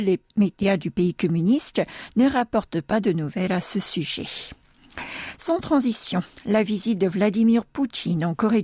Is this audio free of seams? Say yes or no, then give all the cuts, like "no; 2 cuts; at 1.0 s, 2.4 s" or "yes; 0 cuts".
yes; 0 cuts